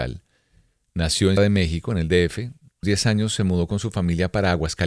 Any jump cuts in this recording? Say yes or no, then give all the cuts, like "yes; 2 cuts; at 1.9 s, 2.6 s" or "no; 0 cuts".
yes; 2 cuts; at 1.4 s, 2.8 s